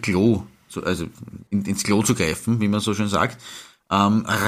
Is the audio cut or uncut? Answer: cut